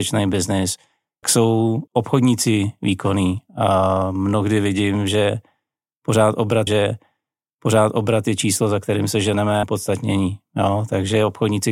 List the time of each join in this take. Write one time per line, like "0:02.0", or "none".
0:01.2
0:01.9
0:06.7
0:09.6